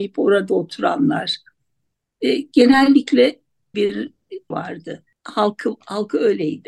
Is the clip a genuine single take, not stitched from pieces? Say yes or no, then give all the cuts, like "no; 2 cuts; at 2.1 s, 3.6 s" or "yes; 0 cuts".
no; 2 cuts; at 3.7 s, 4.5 s